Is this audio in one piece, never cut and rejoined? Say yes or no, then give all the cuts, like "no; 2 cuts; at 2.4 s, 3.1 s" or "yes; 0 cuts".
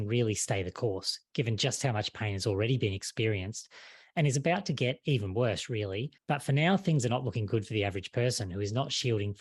no; 1 cut; at 6.2 s